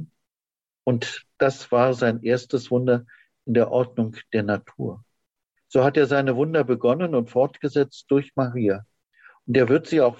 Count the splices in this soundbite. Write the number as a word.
zero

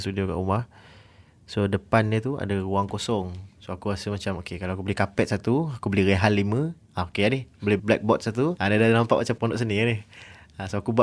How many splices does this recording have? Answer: three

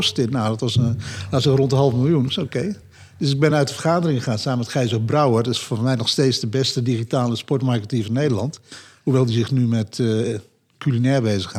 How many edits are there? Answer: zero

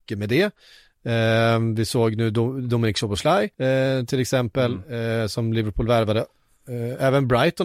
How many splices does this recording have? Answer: one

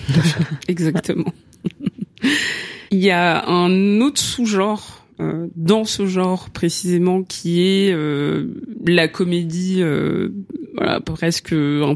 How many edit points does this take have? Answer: one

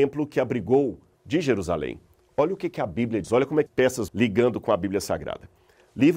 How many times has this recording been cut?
four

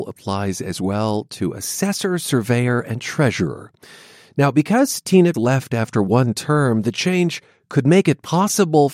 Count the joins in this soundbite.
one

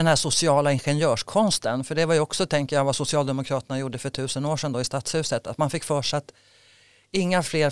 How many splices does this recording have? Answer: zero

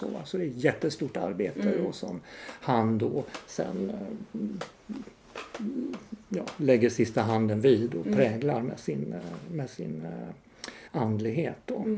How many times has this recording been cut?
one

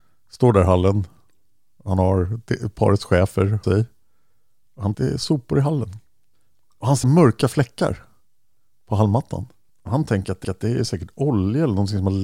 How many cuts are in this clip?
five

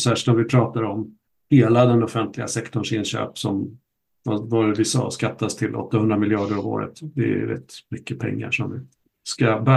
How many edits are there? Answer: zero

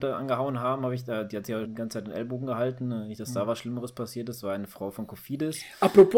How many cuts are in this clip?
one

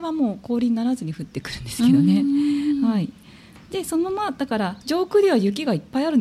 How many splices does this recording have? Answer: one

